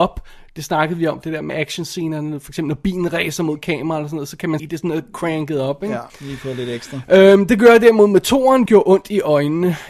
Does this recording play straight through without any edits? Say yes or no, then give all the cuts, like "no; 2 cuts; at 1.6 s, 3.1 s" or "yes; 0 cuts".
no; 4 cuts; at 1.5 s, 4.6 s, 6.1 s, 8.7 s